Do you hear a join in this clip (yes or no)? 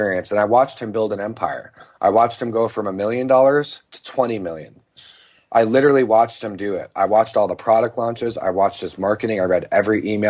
no